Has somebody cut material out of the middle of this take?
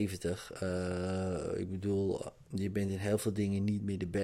no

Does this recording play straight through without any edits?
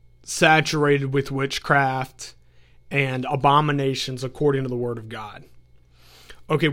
yes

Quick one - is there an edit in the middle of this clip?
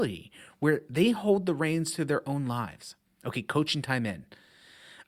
yes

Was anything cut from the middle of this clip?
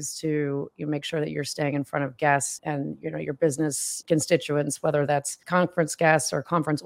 no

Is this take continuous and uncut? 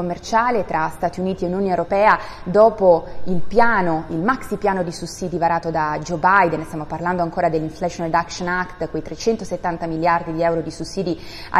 yes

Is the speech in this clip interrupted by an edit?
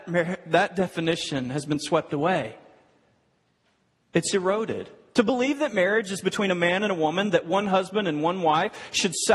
no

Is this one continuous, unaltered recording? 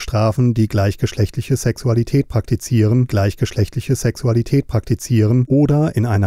no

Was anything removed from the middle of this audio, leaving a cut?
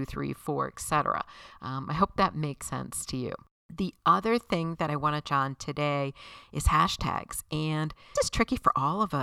yes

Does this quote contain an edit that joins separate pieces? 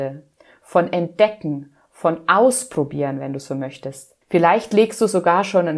yes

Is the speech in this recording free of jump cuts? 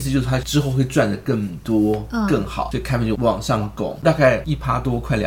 yes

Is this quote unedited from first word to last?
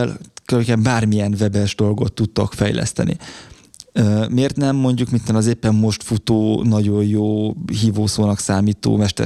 yes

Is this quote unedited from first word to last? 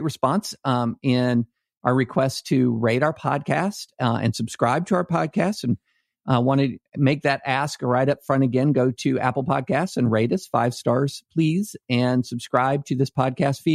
yes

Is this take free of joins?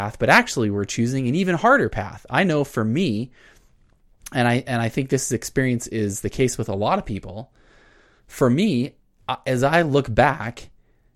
yes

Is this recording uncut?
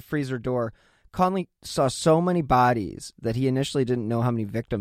yes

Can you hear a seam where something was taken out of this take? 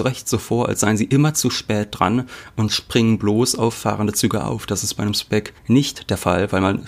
yes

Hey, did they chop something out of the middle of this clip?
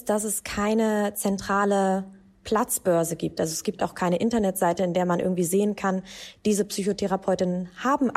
no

